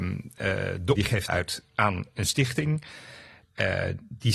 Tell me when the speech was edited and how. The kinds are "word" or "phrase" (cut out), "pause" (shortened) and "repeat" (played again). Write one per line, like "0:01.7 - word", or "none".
0:00.9 - word
0:01.3 - word